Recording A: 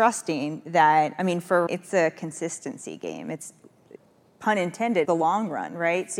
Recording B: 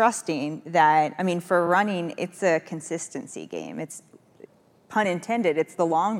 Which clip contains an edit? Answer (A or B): A